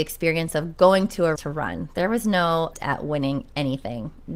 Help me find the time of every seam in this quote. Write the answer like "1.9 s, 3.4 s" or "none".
1.4 s, 2.7 s